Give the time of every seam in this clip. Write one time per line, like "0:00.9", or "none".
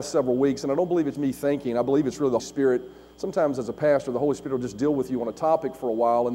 0:01.1
0:02.4